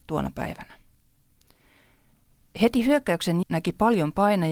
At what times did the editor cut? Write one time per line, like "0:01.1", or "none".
0:03.4